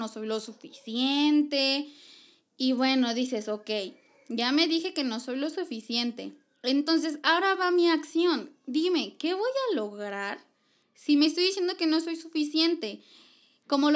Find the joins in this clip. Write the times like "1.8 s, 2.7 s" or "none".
none